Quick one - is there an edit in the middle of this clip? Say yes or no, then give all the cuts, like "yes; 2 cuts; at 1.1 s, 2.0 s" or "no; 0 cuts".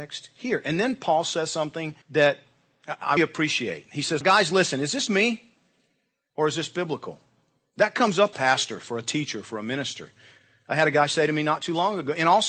yes; 5 cuts; at 2.0 s, 3.2 s, 4.2 s, 5.1 s, 8.3 s